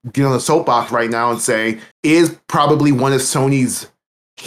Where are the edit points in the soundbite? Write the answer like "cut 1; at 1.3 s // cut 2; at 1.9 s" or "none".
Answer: cut 1; at 1.9 s